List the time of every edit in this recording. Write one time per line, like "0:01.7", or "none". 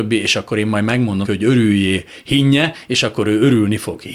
0:01.2